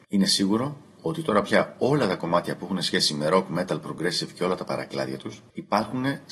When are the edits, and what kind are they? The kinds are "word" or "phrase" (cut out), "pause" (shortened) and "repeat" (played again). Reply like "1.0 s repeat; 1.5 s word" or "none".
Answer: none